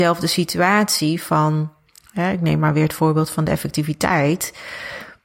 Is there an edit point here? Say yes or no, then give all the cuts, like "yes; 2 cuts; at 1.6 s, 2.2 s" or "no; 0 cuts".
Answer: no; 0 cuts